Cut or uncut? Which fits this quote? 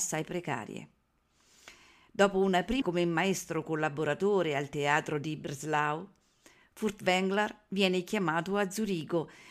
cut